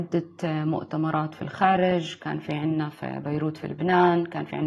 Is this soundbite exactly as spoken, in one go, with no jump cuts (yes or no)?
yes